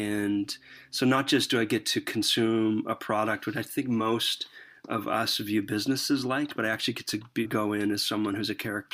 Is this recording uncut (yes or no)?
no